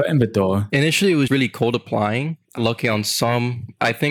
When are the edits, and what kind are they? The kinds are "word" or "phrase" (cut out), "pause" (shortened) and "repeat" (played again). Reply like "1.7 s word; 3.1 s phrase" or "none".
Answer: 1.3 s word; 2.6 s word